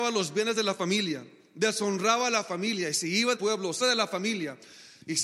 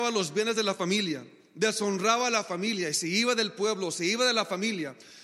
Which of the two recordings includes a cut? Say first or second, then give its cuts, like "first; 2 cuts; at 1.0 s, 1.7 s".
first; 2 cuts; at 3.3 s, 3.8 s